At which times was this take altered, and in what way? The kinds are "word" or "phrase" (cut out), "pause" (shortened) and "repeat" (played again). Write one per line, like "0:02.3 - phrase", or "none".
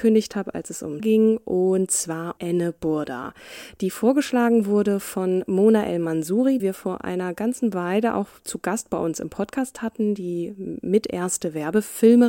0:01.0 - word
0:02.4 - word
0:06.6 - word